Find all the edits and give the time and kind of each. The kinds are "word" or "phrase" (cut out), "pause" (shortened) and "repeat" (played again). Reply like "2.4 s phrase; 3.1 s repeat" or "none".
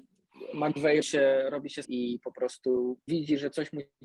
1.0 s word; 1.8 s word; 3.1 s word